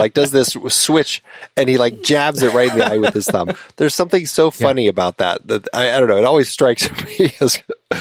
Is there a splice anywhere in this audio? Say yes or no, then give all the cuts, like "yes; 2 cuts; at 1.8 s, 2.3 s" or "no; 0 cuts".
no; 0 cuts